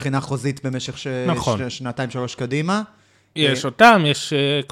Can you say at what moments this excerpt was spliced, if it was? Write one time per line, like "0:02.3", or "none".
none